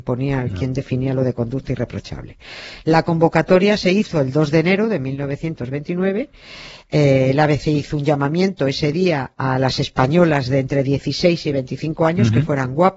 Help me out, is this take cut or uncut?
uncut